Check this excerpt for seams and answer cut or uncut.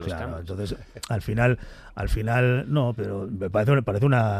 cut